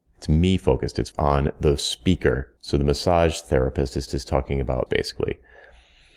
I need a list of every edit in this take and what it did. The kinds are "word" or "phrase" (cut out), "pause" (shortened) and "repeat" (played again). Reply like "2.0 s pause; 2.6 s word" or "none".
1.1 s word; 2.6 s pause; 4.1 s repeat; 4.9 s word